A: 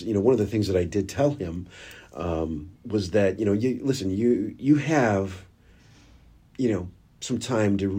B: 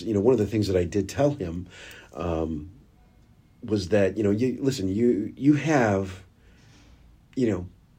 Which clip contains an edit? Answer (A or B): A